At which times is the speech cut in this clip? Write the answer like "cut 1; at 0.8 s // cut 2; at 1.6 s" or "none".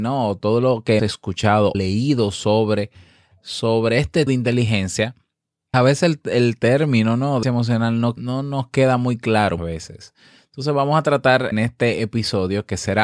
cut 1; at 1.0 s // cut 2; at 1.7 s // cut 3; at 4.3 s // cut 4; at 5.7 s // cut 5; at 7.4 s // cut 6; at 8.2 s // cut 7; at 9.6 s // cut 8; at 11.5 s